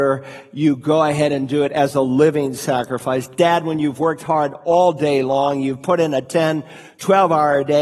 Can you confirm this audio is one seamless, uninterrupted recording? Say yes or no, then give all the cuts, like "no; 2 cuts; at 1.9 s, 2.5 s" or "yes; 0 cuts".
yes; 0 cuts